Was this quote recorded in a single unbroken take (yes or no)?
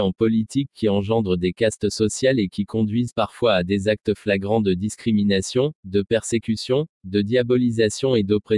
yes